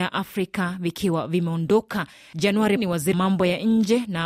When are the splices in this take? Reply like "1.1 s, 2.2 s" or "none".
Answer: 2.8 s, 3.1 s